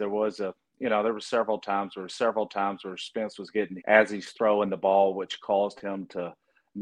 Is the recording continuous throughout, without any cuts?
no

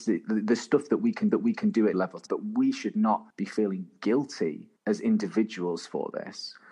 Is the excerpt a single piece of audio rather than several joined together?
no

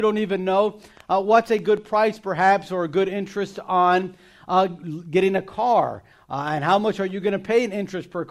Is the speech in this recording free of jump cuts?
yes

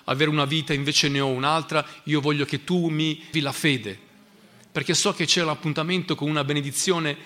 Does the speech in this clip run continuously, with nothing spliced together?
no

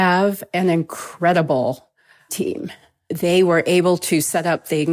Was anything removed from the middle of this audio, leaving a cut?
yes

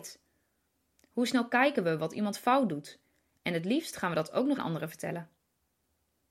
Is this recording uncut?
no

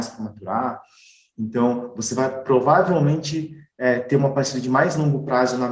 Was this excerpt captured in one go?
yes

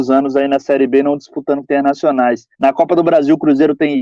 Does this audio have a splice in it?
yes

